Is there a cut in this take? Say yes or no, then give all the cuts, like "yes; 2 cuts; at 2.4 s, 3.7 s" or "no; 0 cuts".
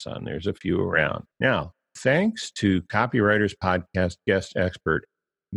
yes; 1 cut; at 1.3 s